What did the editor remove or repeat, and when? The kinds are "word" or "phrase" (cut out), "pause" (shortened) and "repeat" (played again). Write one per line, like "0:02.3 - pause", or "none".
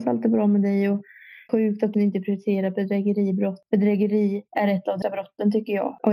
0:01.5 - phrase
0:01.9 - word
0:04.5 - pause
0:05.0 - word